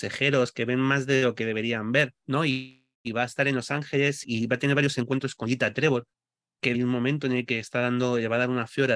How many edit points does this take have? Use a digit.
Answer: 4